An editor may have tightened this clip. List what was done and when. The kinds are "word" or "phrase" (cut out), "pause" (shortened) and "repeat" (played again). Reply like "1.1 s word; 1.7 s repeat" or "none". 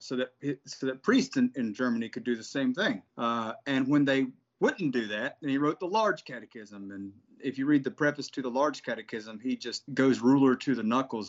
3.1 s pause; 9.9 s word